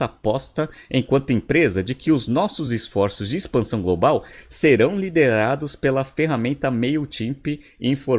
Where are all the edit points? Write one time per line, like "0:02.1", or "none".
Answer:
none